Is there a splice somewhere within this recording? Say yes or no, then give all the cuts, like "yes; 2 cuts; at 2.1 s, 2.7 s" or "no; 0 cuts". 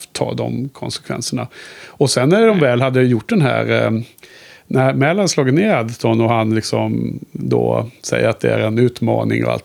no; 0 cuts